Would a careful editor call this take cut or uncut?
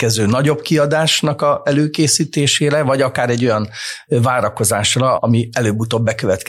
cut